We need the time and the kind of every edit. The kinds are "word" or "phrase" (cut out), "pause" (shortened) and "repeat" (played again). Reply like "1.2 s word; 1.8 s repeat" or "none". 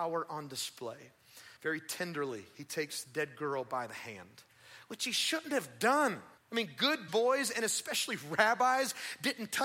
1.6 s pause; 3.0 s word; 6.4 s pause; 7.1 s word

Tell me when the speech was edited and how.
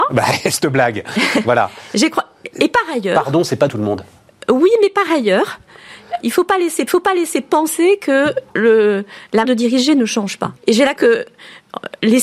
3.7 s phrase; 6.2 s word; 6.9 s repeat; 8.5 s pause; 9.4 s word; 10.6 s pause; 11.0 s word

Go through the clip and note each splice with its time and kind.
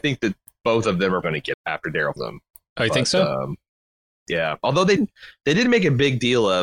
1.2 s word; 1.5 s word; 2.2 s word; 5.0 s word

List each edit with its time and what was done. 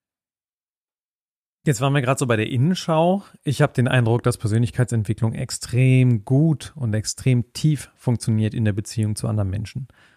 none

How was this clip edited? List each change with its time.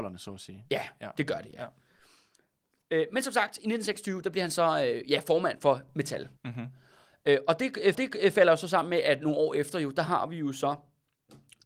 6.4 s pause; 7.9 s repeat

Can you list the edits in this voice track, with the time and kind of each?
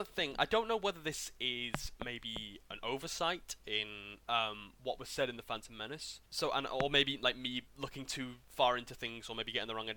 7.7 s pause; 8.4 s pause

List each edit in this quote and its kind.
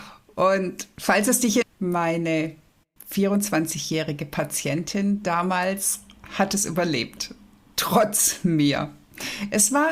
1.6 s word

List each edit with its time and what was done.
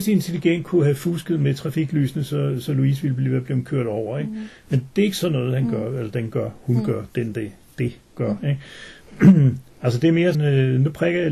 10.3 s word

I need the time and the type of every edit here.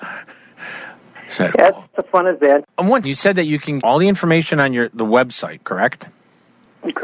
1.9 s word; 3.0 s word; 3.8 s word

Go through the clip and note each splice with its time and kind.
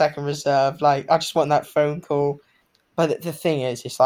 none

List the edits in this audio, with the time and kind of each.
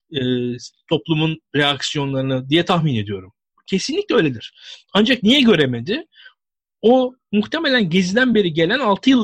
none

